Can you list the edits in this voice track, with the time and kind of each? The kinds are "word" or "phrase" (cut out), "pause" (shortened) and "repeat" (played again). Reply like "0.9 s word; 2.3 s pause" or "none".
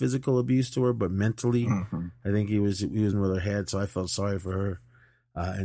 3.1 s word